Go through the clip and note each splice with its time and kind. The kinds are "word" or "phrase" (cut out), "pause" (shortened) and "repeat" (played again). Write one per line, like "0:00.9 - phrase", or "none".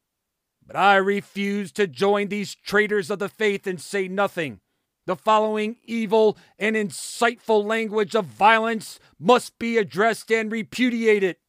0:04.8 - pause

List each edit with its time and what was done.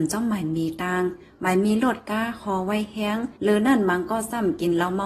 0:03.4 - pause

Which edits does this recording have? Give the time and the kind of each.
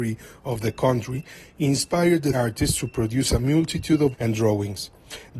0:02.3 - word
0:04.1 - word

